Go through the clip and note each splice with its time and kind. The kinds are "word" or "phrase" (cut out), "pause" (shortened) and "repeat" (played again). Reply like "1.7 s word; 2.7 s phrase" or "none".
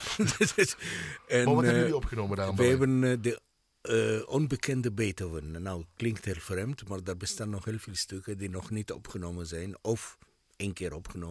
none

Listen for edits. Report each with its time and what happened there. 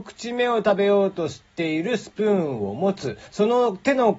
3.3 s pause

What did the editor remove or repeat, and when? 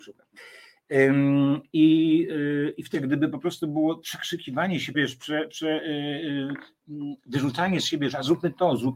2.9 s word; 4.9 s word

